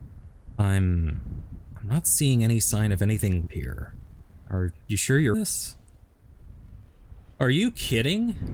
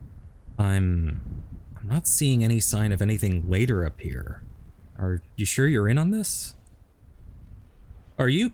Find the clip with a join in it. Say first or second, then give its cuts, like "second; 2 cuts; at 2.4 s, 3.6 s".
first; 2 cuts; at 3.5 s, 5.3 s